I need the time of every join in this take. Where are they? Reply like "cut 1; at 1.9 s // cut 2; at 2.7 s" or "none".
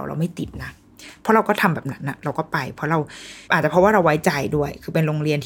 cut 1; at 3.4 s